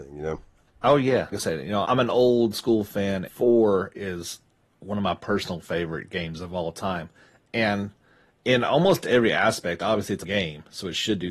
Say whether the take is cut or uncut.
cut